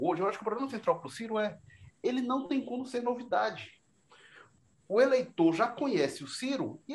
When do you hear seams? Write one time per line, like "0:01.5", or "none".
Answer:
none